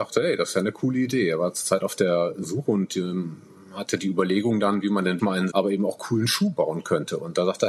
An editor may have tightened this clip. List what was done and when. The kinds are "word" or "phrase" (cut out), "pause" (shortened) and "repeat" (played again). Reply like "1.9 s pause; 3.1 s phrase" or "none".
5.2 s word; 5.5 s phrase

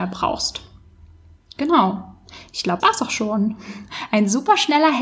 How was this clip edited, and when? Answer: 2.8 s word

